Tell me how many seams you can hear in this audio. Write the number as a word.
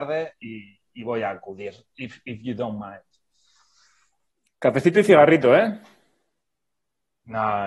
zero